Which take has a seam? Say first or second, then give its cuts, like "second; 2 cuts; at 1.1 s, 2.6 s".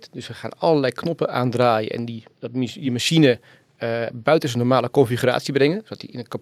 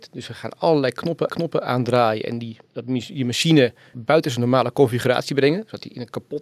second; 2 cuts; at 1.3 s, 3.9 s